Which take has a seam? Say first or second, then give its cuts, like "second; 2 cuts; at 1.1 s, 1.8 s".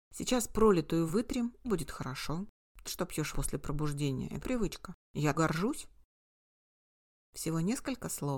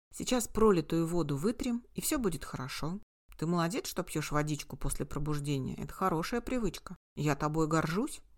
first; 6 cuts; at 1.1 s, 1.6 s, 2.8 s, 3.3 s, 4.4 s, 5.3 s